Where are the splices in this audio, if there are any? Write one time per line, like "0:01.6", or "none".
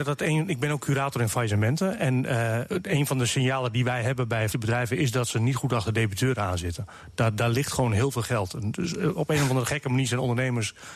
0:02.7
0:04.5